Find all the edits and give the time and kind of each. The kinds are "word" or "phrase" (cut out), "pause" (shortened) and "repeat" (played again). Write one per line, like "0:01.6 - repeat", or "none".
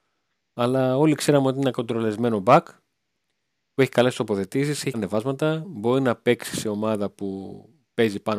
0:04.9 - word